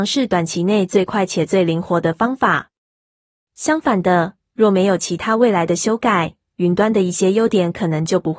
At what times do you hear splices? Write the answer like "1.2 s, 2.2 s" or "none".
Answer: none